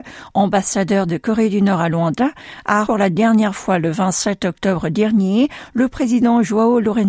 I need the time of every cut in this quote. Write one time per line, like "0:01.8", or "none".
0:02.8